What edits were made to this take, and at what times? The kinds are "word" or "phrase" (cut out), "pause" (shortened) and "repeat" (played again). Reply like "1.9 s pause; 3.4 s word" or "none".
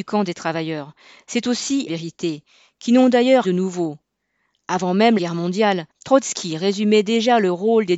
1.9 s phrase; 3.4 s word; 5.2 s phrase; 5.9 s pause